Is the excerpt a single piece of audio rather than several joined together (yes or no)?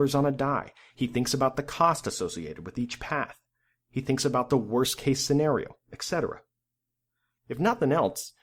yes